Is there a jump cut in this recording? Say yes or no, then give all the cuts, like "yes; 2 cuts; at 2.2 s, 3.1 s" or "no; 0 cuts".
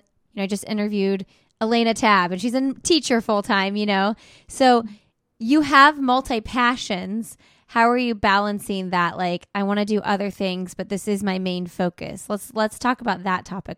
no; 0 cuts